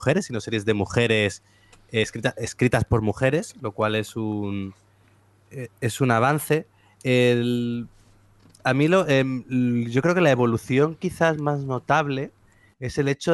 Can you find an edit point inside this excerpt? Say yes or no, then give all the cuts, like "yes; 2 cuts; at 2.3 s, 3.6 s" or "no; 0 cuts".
no; 0 cuts